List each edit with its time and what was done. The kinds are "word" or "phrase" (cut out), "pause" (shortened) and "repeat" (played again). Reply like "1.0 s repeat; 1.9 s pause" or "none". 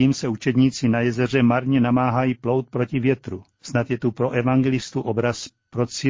3.5 s pause